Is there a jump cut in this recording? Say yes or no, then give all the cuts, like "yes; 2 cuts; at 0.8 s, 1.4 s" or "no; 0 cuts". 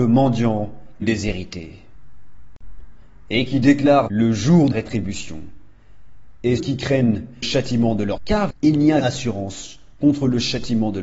yes; 8 cuts; at 1.0 s, 4.1 s, 4.7 s, 6.6 s, 7.4 s, 8.2 s, 8.5 s, 9.0 s